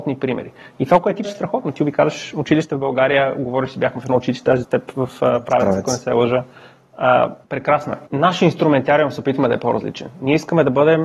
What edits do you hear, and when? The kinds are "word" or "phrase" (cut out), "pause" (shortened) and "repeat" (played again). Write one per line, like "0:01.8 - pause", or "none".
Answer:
0:01.2 - word
0:04.6 - word
0:07.4 - pause
0:08.1 - pause